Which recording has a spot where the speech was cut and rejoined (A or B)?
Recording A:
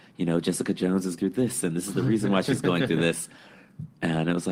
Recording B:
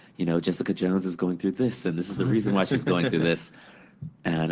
A